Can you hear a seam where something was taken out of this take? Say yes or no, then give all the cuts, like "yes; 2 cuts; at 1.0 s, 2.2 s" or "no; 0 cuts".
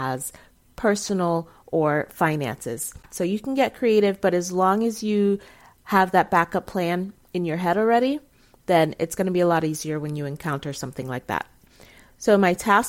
no; 0 cuts